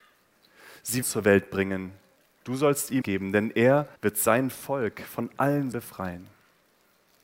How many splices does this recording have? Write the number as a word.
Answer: five